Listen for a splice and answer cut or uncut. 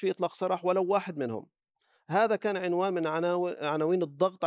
uncut